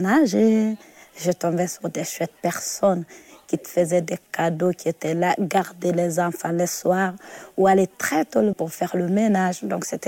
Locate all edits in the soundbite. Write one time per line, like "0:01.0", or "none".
0:08.5